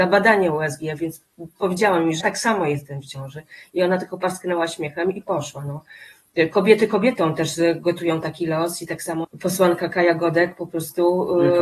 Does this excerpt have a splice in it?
yes; 2 cuts; at 2.2 s, 9.2 s

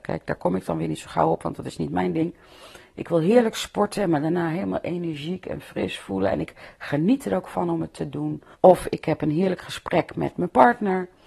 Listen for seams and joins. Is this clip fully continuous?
no; 1 cut; at 8.5 s

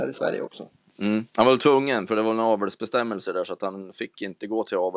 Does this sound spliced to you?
no; 0 cuts

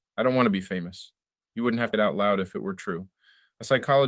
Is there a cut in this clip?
yes; 1 cut; at 1.9 s

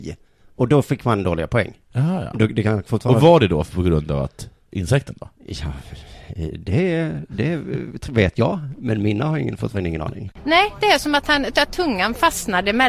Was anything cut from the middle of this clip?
no; 0 cuts

